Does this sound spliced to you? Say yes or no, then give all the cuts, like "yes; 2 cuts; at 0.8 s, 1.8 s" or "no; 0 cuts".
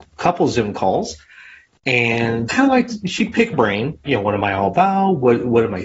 yes; 3 cuts; at 2.5 s, 3.5 s, 4.1 s